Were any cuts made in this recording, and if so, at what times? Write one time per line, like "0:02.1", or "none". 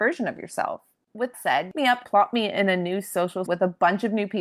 0:01.3
0:01.7
0:02.0
0:03.5